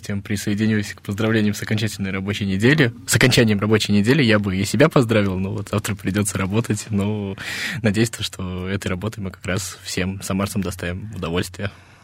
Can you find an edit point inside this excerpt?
no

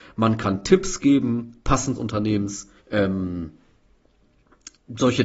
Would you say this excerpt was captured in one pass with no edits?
no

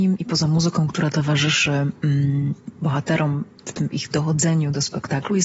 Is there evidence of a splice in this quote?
yes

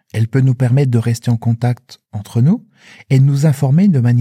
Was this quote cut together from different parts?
no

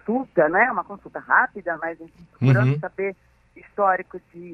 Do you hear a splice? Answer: no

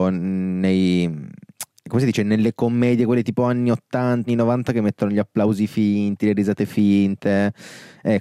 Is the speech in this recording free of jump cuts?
no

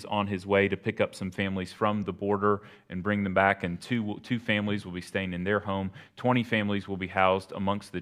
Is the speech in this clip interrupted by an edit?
no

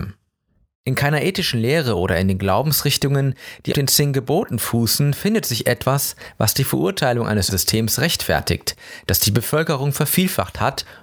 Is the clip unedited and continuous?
no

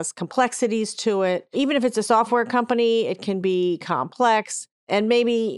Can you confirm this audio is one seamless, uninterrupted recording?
yes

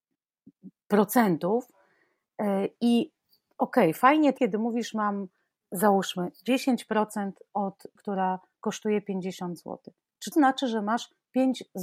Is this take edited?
yes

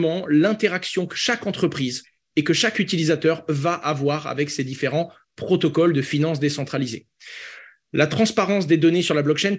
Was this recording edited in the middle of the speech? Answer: no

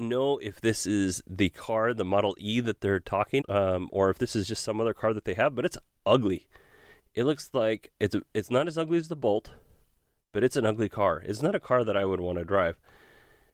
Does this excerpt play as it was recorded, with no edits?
no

